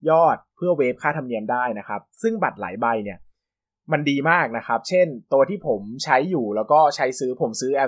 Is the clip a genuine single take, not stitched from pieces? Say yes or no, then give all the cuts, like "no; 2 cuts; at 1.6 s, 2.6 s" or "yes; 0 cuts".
yes; 0 cuts